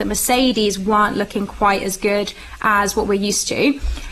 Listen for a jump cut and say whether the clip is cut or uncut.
uncut